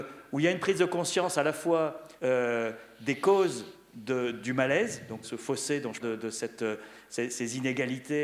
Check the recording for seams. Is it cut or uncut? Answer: cut